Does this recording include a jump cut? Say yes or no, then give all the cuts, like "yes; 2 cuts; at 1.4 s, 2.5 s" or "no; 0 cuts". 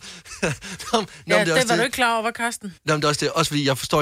yes; 1 cut; at 2.8 s